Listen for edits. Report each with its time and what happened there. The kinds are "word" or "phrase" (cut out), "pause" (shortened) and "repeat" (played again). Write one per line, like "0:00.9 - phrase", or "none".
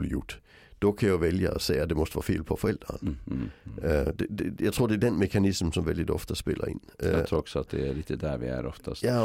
none